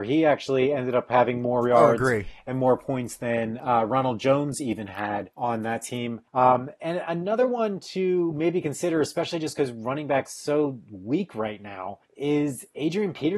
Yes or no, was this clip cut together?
yes